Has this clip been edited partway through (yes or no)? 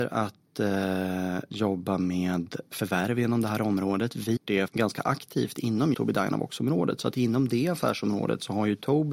yes